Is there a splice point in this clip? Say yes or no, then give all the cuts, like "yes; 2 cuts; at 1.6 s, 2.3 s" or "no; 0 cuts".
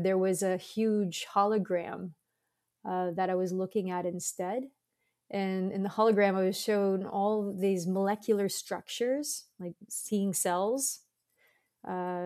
no; 0 cuts